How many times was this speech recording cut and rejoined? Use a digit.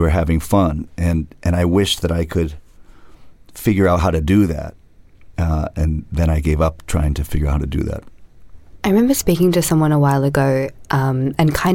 1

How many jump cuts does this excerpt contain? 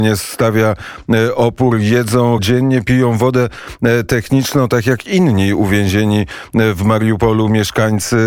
1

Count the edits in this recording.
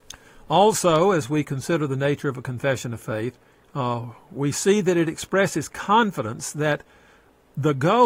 1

